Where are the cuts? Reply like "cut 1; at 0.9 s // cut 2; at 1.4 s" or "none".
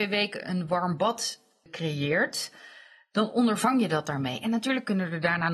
none